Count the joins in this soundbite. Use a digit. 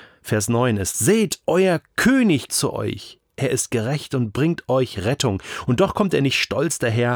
2